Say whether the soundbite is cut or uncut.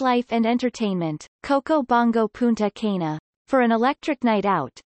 cut